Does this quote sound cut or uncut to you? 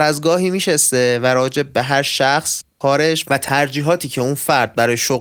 cut